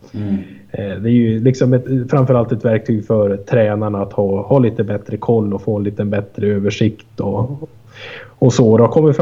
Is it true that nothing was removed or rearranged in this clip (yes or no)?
yes